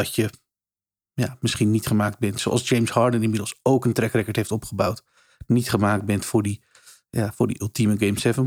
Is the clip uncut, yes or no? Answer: yes